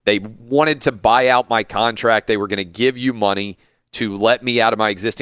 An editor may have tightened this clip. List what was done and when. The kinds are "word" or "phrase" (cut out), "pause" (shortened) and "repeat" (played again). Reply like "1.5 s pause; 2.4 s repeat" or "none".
none